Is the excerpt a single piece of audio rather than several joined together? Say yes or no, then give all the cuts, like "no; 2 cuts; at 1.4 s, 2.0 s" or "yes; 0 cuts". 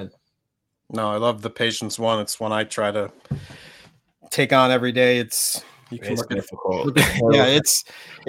yes; 0 cuts